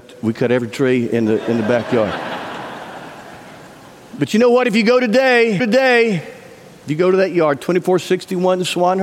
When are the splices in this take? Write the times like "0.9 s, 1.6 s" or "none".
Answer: 5.6 s